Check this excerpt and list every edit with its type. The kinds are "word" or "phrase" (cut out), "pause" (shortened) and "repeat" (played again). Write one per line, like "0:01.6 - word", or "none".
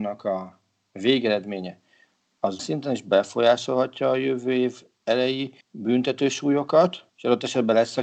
0:02.6 - word
0:05.6 - pause
0:07.1 - pause